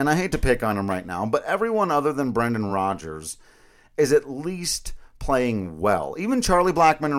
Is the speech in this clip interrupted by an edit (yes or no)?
no